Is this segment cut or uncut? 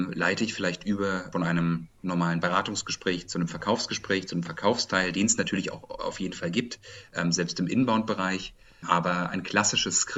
uncut